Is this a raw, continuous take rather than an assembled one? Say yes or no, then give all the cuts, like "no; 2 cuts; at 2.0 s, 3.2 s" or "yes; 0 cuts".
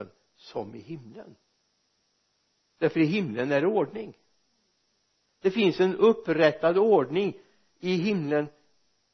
yes; 0 cuts